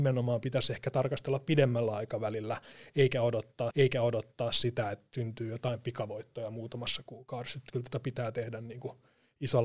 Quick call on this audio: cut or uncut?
cut